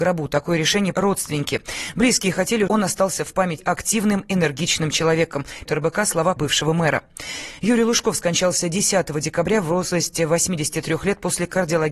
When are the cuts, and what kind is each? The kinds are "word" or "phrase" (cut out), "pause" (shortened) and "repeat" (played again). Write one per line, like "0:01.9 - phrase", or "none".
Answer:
0:00.9 - word
0:02.7 - word
0:03.6 - word
0:05.7 - word
0:06.4 - word